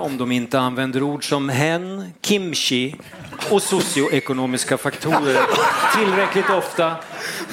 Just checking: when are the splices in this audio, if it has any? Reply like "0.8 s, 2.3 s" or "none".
none